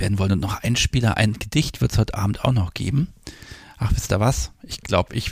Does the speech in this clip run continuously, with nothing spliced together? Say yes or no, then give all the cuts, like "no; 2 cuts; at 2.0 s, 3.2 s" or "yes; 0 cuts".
yes; 0 cuts